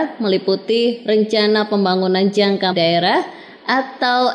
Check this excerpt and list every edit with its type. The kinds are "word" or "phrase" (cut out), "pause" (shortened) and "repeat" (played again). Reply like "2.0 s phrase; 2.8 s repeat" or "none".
2.7 s word